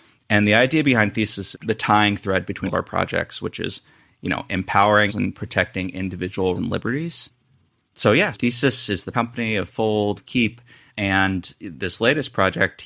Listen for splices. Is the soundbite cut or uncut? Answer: cut